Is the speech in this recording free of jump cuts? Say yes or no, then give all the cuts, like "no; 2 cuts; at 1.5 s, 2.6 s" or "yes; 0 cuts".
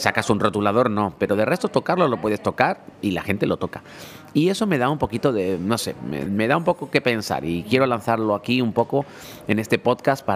no; 1 cut; at 6.3 s